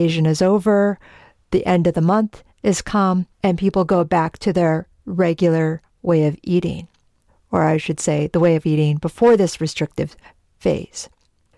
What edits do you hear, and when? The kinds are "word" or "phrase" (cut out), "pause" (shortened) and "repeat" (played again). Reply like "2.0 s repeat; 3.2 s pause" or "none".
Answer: 2.5 s pause; 3.3 s pause; 7.3 s pause